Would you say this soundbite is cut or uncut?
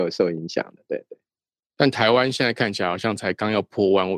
uncut